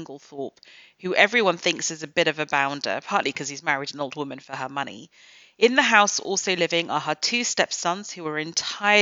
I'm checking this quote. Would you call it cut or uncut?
uncut